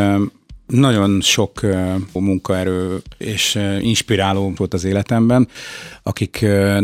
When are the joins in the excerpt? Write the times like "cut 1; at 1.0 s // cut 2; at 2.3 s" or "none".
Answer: cut 1; at 2.2 s // cut 2; at 3.2 s // cut 3; at 4.6 s

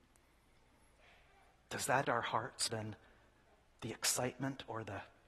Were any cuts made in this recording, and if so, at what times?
cut 1; at 2.0 s // cut 2; at 2.7 s

